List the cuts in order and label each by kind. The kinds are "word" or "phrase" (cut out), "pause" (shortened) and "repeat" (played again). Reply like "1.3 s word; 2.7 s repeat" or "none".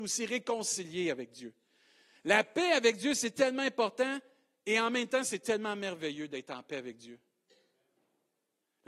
none